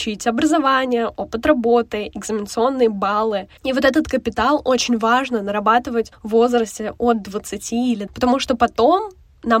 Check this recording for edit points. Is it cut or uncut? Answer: cut